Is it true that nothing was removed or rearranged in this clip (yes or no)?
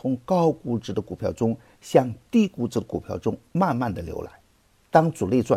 yes